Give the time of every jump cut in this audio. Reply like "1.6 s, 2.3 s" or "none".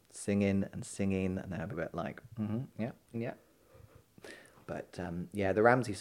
1.7 s, 3.1 s